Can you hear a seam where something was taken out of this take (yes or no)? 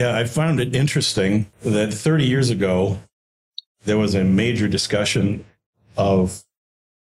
yes